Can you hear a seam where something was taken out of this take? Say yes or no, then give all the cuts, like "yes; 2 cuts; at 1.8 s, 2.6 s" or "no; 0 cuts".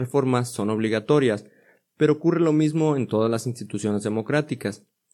no; 0 cuts